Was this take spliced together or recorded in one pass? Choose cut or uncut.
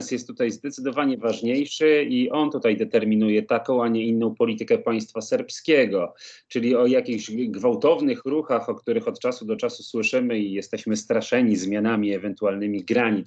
uncut